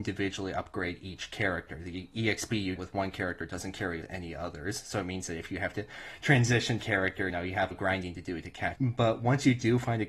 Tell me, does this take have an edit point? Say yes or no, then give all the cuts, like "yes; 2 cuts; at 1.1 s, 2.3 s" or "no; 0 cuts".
yes; 6 cuts; at 2.8 s, 4.0 s, 6.8 s, 7.3 s, 7.7 s, 8.8 s